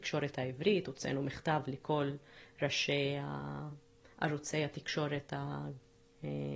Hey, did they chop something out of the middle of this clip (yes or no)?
no